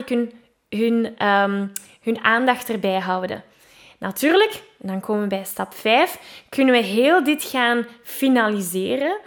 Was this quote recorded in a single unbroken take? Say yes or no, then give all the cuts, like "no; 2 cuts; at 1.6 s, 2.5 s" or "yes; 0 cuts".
yes; 0 cuts